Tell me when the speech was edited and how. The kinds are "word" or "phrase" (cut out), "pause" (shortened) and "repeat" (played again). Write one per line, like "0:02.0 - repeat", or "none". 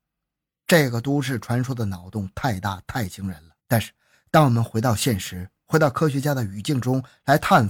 0:03.6 - pause